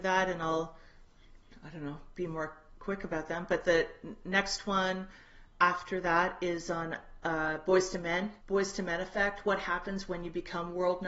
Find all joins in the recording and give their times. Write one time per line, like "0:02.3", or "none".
0:08.4